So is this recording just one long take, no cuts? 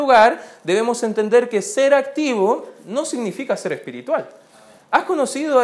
yes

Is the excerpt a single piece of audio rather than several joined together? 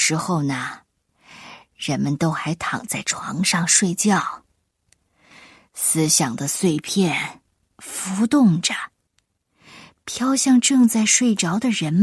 yes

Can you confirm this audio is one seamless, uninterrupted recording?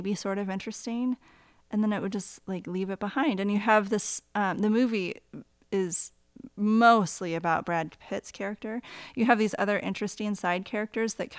yes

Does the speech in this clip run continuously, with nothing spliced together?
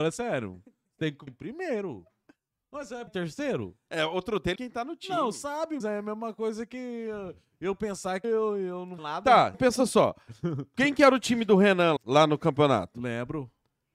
no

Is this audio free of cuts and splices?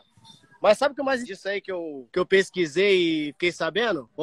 no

